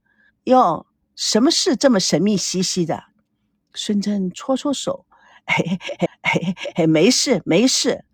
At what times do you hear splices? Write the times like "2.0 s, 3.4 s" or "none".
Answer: 6.1 s

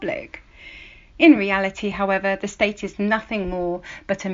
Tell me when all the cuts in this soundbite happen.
none

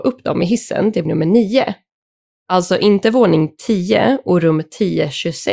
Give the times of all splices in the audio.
1.1 s

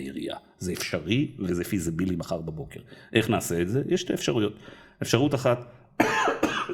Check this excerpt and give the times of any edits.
none

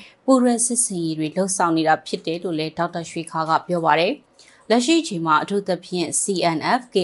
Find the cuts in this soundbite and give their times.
4.2 s

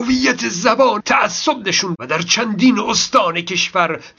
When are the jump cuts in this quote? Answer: 1.0 s, 1.9 s

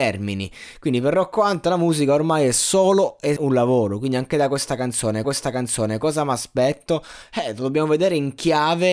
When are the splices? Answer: 3.4 s, 5.2 s

